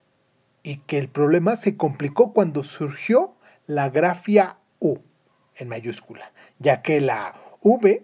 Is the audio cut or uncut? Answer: uncut